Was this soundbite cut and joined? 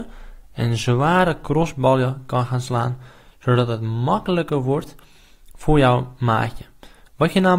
no; 0 cuts

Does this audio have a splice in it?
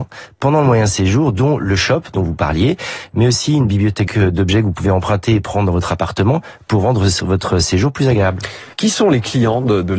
yes; 2 cuts; at 4.1 s, 8.7 s

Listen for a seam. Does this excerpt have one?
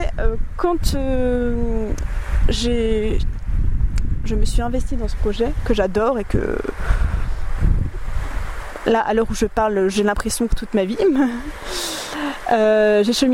yes; 1 cut; at 10.5 s

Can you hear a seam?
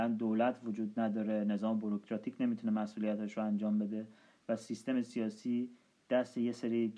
no; 0 cuts

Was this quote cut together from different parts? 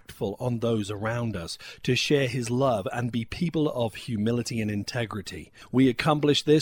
no; 0 cuts

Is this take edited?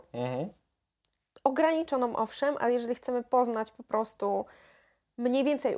no; 0 cuts

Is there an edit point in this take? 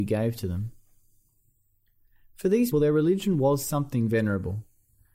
yes; 1 cut; at 2.7 s

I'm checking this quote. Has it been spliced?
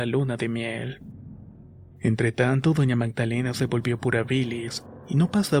yes; 1 cut; at 1.9 s

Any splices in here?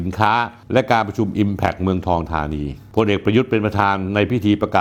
no; 0 cuts

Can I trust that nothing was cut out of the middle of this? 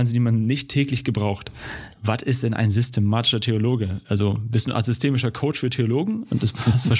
yes; 0 cuts

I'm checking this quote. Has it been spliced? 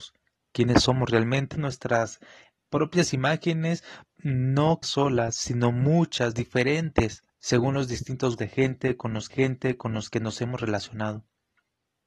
yes; 6 cuts; at 1.5 s, 4.0 s, 4.8 s, 7.3 s, 8.4 s, 9.3 s

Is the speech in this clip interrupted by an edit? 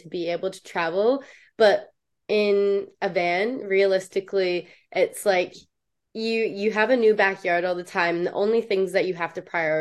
no; 0 cuts

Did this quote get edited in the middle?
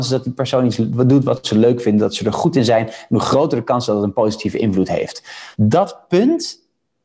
yes; 1 cut; at 5.5 s

